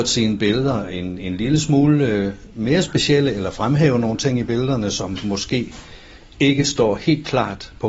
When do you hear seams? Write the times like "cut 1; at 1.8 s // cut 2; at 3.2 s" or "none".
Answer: none